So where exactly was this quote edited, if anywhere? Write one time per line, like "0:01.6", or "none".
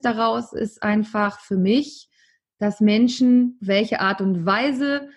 none